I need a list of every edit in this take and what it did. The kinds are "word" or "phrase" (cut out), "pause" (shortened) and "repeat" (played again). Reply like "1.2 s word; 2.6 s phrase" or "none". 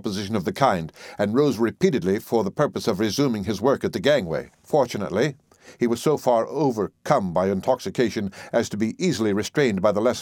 4.5 s pause